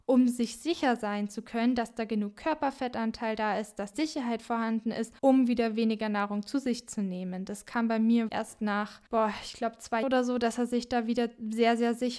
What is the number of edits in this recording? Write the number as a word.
five